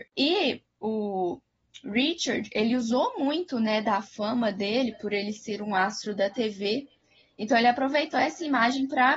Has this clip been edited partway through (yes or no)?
no